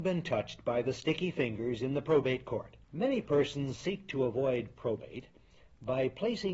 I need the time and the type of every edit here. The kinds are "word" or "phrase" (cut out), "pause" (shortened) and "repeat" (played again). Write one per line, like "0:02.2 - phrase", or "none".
0:02.8 - pause